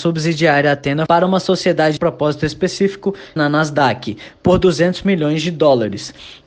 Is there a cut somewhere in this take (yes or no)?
yes